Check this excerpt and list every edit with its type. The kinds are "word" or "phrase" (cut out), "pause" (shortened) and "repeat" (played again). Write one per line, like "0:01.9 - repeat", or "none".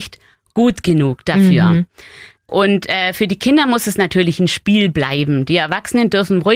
none